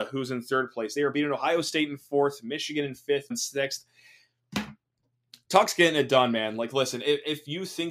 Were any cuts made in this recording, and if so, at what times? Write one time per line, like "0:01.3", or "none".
0:03.3